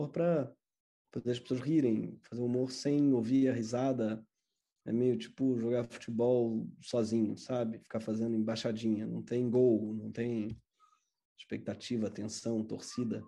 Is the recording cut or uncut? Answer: uncut